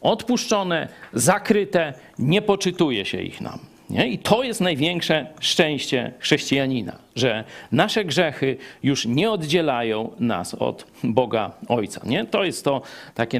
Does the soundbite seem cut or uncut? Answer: uncut